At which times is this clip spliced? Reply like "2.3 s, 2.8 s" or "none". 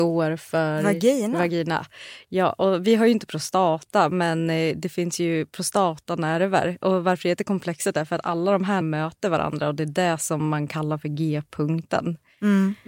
8.8 s